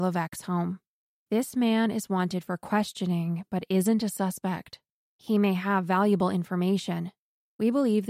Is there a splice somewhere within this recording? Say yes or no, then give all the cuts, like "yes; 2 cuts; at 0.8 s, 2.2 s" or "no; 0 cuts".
no; 0 cuts